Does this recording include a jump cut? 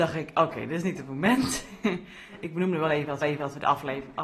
yes; 1 cut; at 3.2 s

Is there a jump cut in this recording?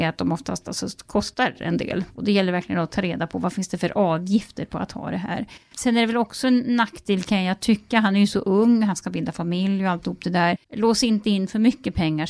yes; 1 cut; at 10.6 s

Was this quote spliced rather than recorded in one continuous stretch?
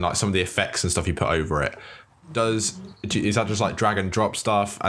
no; 0 cuts

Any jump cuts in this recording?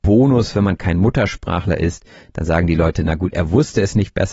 no; 0 cuts

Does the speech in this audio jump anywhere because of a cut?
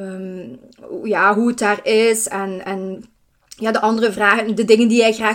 no; 0 cuts

